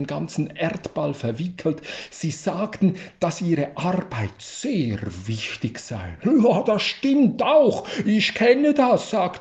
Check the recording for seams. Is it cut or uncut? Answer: uncut